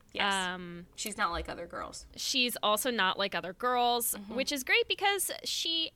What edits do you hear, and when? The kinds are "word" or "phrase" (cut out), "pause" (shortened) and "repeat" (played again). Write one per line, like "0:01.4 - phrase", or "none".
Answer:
none